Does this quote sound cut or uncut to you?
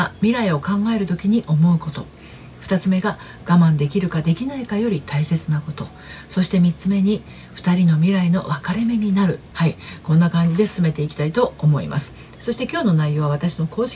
cut